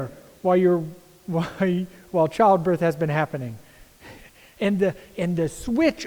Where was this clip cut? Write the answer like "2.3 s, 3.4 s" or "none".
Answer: none